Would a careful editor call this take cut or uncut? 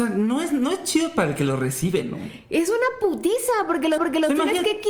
cut